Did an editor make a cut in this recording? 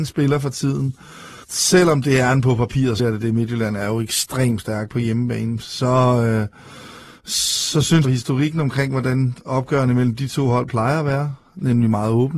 yes; 3 cuts; at 1.4 s, 3.0 s, 8.0 s

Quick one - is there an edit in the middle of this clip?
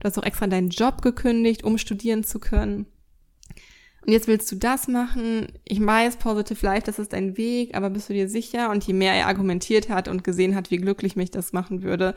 no; 0 cuts

